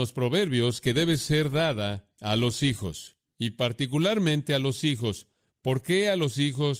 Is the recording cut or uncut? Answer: uncut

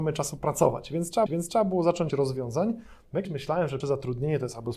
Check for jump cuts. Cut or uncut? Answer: cut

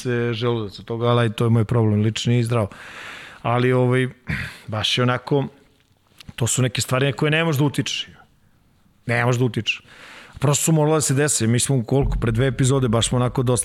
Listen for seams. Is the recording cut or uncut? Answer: uncut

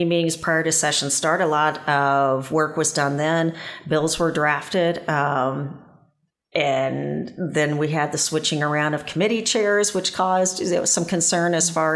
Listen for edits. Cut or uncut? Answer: uncut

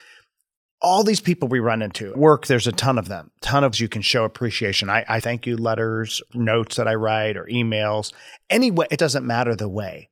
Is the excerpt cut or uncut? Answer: cut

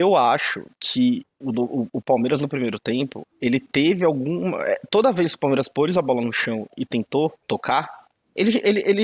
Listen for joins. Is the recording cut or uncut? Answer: cut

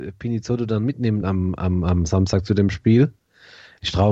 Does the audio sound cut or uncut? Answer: uncut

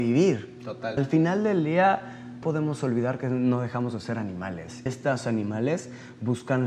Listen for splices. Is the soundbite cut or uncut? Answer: cut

